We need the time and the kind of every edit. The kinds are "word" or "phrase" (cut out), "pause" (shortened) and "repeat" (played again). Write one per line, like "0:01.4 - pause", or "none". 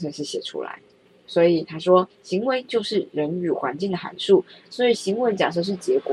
0:02.1 - pause